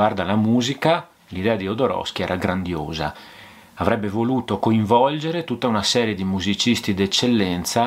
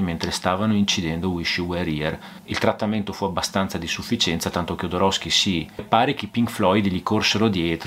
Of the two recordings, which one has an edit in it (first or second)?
second